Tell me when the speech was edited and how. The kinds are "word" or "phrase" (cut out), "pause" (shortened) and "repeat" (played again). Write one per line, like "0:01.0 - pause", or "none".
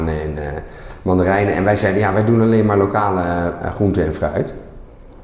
none